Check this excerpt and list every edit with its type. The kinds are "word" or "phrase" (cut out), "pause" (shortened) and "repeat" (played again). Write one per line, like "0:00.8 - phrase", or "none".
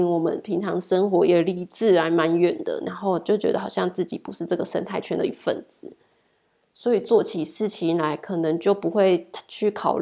none